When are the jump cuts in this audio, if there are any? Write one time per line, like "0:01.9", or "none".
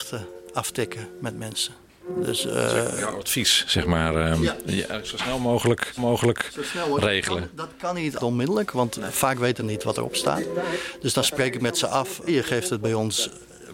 0:06.0
0:08.2
0:09.6
0:12.3

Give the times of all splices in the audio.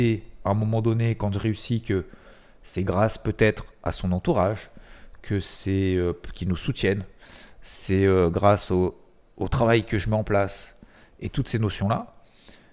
none

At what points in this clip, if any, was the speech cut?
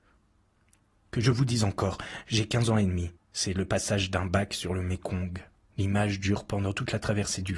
0:03.2
0:05.6

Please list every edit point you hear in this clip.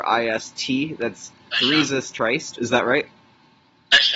none

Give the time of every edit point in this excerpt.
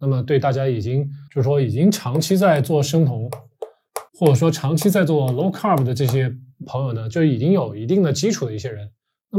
0:01.3
0:04.1

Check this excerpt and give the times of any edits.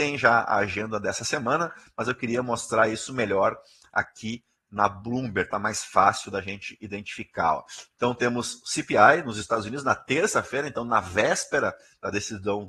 none

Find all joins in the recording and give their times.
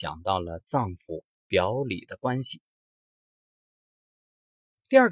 none

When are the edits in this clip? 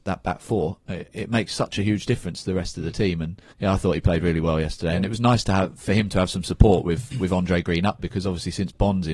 0:03.5
0:08.0

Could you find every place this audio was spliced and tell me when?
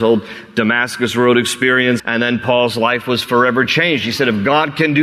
0:02.0

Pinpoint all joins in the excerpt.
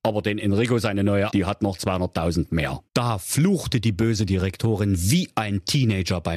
0:01.3
0:02.9

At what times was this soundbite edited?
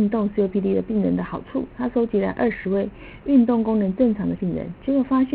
0:04.4

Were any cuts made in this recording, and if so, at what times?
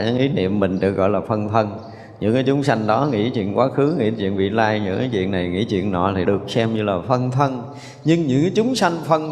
0:06.2

